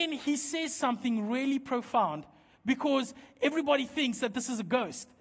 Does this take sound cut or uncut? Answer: uncut